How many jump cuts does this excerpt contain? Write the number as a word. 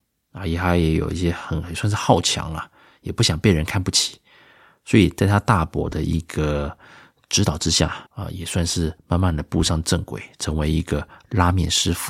two